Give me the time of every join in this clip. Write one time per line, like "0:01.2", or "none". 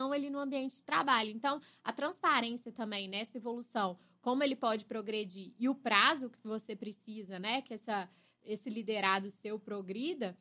none